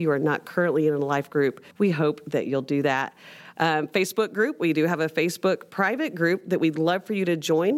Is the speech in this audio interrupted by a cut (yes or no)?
yes